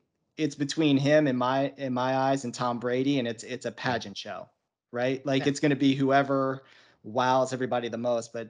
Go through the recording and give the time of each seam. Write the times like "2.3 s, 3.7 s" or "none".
none